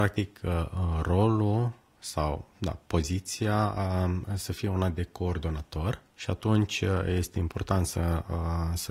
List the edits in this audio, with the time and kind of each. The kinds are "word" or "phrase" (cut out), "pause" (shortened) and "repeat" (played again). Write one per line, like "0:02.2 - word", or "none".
0:06.1 - pause